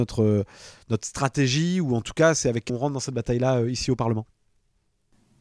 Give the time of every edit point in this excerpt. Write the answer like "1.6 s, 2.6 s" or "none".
2.7 s